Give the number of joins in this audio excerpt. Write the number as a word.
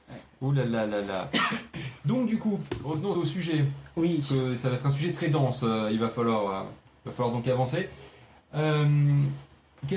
one